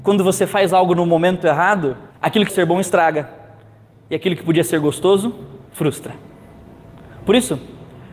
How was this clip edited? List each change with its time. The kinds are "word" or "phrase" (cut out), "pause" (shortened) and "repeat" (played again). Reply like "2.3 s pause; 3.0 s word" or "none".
2.1 s pause; 2.5 s word; 5.7 s pause